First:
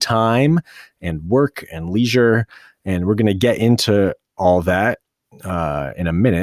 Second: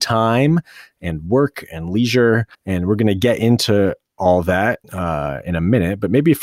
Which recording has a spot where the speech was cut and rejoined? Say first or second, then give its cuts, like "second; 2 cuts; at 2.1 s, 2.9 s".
second; 2 cuts; at 2.5 s, 4.8 s